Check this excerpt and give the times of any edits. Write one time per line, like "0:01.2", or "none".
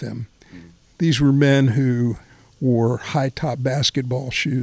0:02.3